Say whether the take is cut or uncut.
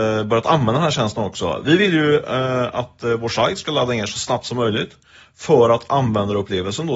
uncut